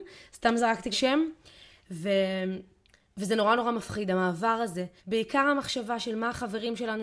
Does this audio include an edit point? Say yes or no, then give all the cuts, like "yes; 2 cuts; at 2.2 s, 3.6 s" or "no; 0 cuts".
yes; 3 cuts; at 0.9 s, 2.9 s, 5.0 s